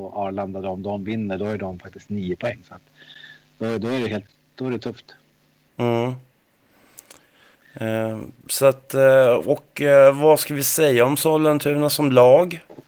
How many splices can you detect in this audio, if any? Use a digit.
0